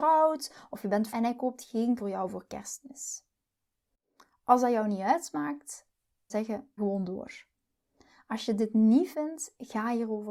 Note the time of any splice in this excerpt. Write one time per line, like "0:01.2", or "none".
0:01.1
0:02.0
0:06.3
0:06.8
0:09.1